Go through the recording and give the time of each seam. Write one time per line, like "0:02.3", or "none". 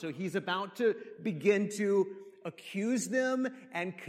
none